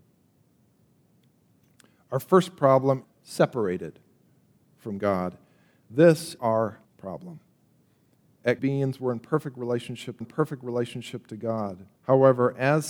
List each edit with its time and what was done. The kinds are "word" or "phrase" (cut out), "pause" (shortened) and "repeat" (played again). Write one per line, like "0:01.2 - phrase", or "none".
0:03.0 - phrase
0:06.4 - word
0:06.8 - word
0:08.6 - phrase
0:10.2 - repeat
0:12.0 - pause